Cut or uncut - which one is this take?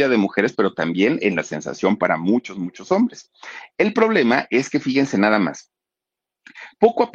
uncut